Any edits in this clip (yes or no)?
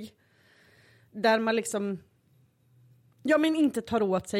no